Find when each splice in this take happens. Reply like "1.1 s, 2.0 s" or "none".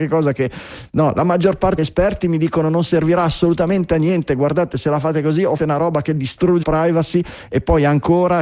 1.8 s, 5.6 s, 6.6 s